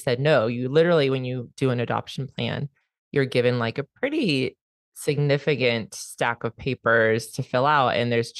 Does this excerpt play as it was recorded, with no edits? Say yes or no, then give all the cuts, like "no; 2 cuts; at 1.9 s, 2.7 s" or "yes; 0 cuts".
yes; 0 cuts